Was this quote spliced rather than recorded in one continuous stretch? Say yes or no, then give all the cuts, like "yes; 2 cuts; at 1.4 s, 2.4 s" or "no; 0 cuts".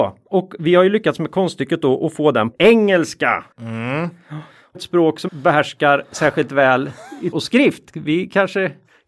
yes; 5 cuts; at 2.5 s, 3.5 s, 4.7 s, 5.3 s, 7.3 s